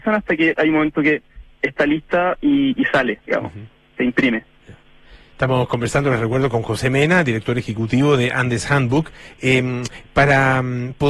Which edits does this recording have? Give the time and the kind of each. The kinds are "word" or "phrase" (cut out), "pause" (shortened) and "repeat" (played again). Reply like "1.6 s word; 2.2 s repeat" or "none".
2.8 s word